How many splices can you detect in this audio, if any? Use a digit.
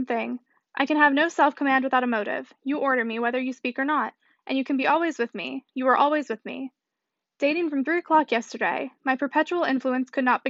0